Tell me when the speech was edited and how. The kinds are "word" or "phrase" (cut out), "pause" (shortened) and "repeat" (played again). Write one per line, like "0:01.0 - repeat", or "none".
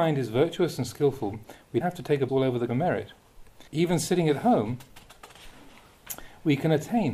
0:01.8 - word
0:02.3 - word
0:02.7 - phrase
0:03.7 - pause